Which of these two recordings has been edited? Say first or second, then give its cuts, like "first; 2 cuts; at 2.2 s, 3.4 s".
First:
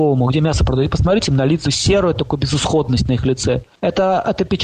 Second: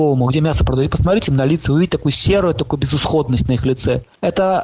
first; 1 cut; at 1.6 s